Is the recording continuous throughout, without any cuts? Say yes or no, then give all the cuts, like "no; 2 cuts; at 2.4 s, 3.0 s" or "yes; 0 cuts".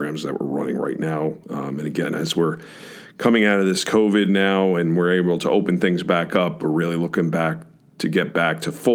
yes; 0 cuts